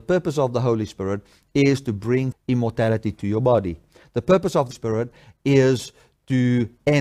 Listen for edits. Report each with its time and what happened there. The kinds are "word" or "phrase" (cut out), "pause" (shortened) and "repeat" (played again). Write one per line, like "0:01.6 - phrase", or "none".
0:02.3 - word
0:04.7 - word